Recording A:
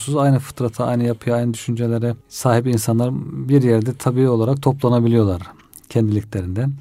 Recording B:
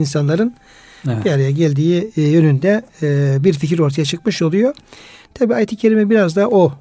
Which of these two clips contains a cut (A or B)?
A